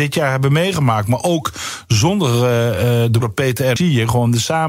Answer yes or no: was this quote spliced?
yes